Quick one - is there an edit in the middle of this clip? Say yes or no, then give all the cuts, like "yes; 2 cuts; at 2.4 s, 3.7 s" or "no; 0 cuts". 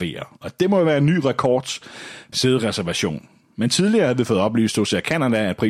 yes; 1 cut; at 2.3 s